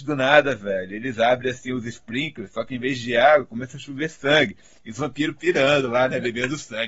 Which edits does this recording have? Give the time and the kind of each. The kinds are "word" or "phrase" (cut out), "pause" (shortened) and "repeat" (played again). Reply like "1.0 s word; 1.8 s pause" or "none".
none